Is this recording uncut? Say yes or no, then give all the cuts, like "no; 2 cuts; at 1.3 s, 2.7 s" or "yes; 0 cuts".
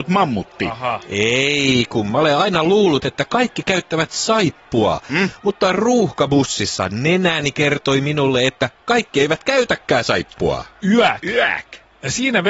yes; 0 cuts